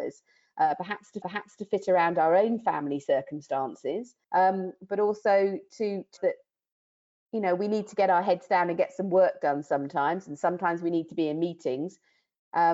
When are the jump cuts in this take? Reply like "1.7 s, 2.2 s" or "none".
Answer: 1.2 s, 4.2 s, 6.2 s